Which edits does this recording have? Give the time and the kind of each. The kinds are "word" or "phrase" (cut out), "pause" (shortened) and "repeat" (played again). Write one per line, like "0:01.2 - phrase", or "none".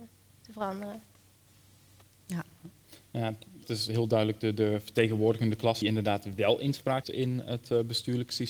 0:03.6 - word
0:05.8 - word
0:07.0 - word